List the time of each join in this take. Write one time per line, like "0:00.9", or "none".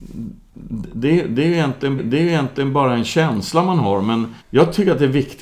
0:02.0
0:04.4